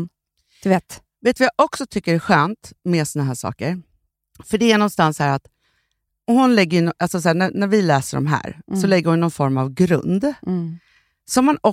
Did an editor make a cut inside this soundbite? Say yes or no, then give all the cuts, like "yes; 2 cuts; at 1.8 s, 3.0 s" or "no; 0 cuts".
no; 0 cuts